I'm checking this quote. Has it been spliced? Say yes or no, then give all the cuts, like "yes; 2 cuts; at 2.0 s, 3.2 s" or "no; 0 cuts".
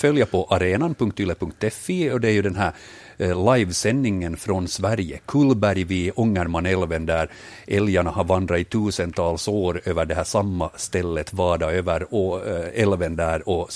no; 0 cuts